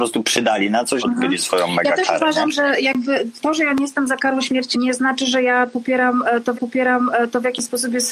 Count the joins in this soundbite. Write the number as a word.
four